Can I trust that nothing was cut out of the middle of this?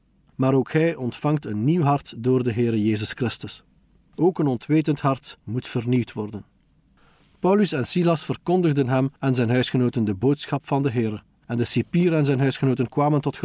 yes; 0 cuts

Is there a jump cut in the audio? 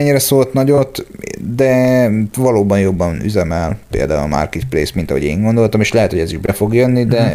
no; 0 cuts

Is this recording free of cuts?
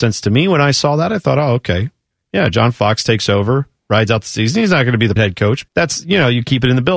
no; 2 cuts; at 5.2 s, 5.7 s

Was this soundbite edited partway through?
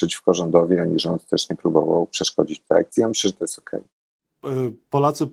no; 0 cuts

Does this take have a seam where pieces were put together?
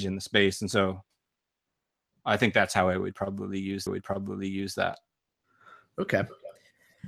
yes; 1 cut; at 3.9 s

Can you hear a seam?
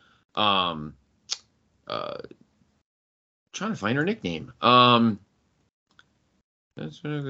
no; 0 cuts

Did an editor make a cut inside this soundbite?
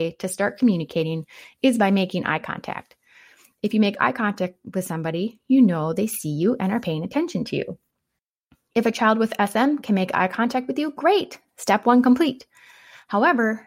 no; 0 cuts

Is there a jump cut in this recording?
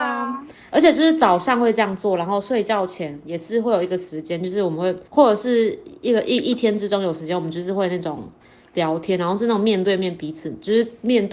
yes; 1 cut; at 5.1 s

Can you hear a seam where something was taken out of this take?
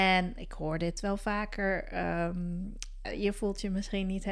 yes; 1 cut; at 3.0 s

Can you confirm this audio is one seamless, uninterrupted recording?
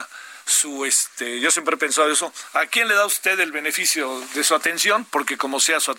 yes; 0 cuts

